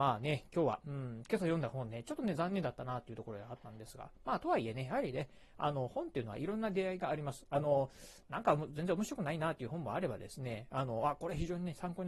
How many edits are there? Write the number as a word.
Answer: zero